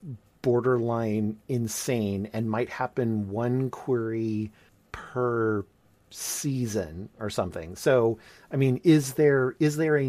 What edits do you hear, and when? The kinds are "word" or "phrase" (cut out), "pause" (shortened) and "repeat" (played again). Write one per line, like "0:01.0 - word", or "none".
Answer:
none